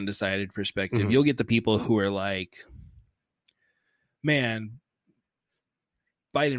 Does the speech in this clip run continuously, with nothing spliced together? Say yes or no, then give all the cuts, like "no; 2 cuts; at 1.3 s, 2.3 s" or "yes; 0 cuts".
yes; 0 cuts